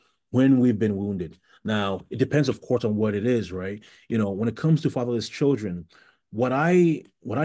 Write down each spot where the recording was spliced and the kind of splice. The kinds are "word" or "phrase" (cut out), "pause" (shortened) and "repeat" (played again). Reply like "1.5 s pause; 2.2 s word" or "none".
none

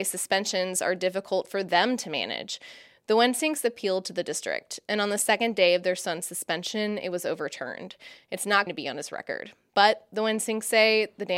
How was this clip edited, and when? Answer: 8.7 s word

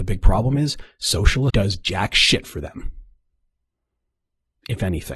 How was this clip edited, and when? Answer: 1.5 s word

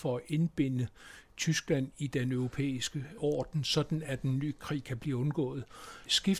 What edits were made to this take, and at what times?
none

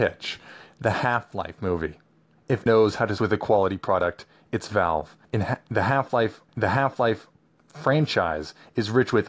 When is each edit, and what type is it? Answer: 2.7 s word; 3.2 s word; 5.2 s pause; 6.5 s repeat

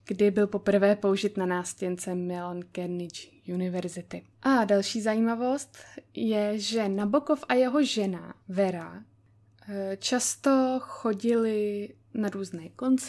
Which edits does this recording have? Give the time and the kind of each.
4.3 s pause; 8.4 s pause; 12.0 s pause

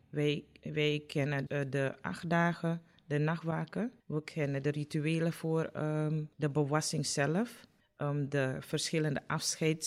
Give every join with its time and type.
1.5 s word; 4.0 s pause; 6.3 s pause; 7.8 s pause

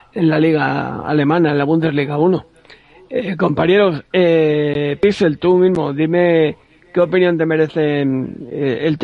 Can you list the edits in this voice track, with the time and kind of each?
none

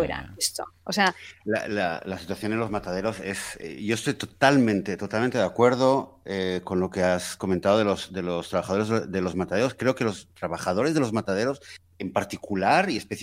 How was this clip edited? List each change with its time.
none

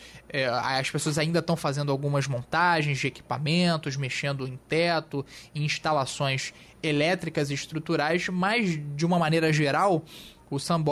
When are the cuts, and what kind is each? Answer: none

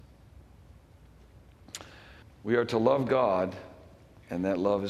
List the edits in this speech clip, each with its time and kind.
2.2 s pause

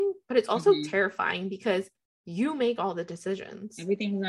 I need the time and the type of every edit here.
none

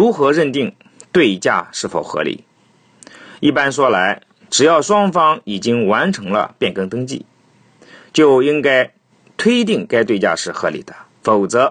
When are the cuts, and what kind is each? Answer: none

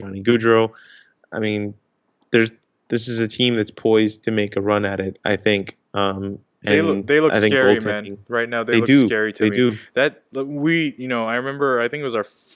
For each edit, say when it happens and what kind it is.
none

